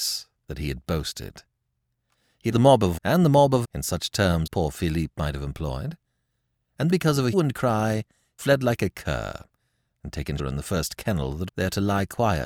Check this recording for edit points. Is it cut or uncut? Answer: cut